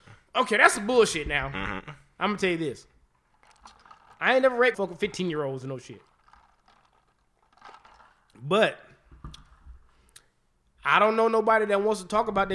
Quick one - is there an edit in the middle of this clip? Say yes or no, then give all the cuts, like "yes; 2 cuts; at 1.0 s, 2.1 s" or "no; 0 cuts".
yes; 1 cut; at 4.7 s